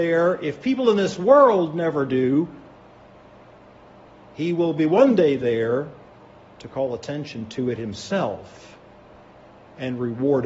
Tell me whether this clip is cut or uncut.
uncut